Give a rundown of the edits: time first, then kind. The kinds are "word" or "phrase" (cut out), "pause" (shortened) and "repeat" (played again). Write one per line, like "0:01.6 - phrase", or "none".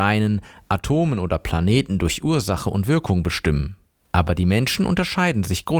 none